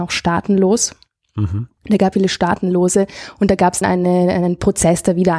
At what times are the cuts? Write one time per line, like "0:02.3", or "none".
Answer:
0:02.1
0:03.8